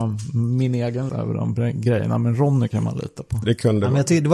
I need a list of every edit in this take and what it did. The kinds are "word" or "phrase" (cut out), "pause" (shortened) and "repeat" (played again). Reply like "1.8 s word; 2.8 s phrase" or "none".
1.1 s word